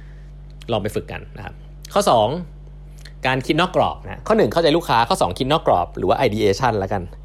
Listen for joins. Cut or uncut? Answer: uncut